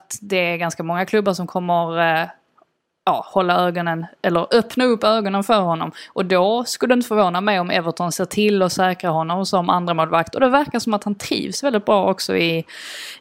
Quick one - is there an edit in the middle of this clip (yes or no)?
no